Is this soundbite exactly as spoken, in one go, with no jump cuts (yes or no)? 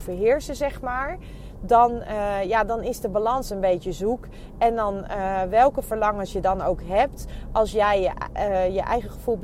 yes